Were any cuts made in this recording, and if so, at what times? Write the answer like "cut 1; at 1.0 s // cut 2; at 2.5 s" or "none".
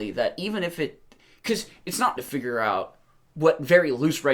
cut 1; at 2.2 s